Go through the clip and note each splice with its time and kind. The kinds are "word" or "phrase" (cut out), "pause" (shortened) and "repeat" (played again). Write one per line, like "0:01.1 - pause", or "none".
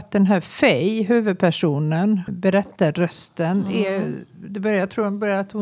0:02.3 - phrase